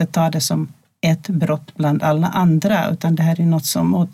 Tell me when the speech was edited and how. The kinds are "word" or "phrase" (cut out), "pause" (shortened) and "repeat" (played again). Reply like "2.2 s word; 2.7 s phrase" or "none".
none